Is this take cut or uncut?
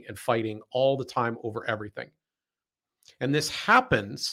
uncut